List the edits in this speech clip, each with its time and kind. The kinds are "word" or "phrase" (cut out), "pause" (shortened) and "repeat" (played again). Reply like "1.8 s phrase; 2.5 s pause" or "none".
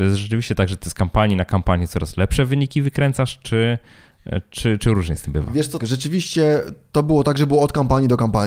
5.8 s word